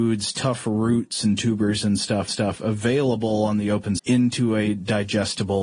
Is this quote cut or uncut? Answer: cut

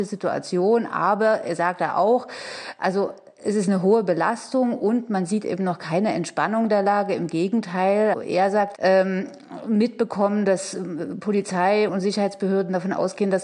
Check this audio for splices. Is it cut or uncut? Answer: cut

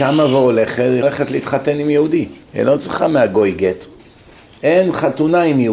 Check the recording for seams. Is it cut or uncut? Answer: cut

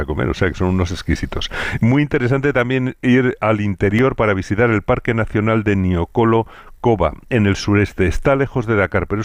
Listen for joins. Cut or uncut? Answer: uncut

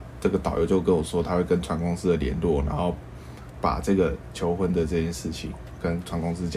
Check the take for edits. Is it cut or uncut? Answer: cut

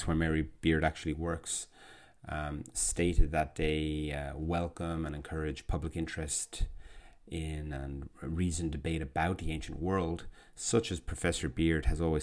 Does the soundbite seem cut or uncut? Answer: uncut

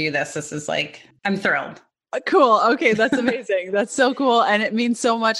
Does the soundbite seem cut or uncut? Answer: cut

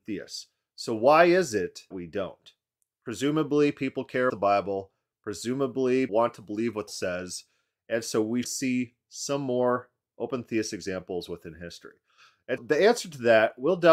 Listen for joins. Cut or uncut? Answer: cut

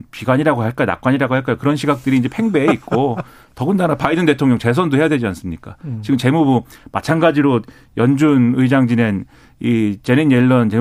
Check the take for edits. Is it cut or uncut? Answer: uncut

